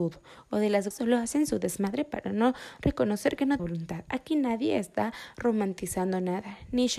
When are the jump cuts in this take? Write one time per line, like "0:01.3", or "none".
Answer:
0:00.9
0:03.6